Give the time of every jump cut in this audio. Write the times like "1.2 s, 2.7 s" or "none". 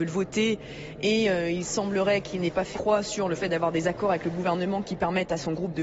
2.7 s